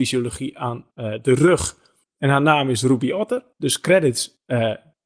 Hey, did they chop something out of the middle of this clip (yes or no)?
no